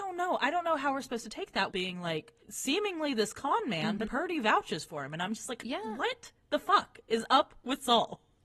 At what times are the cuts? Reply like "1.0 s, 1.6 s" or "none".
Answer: 1.7 s, 2.4 s, 4.1 s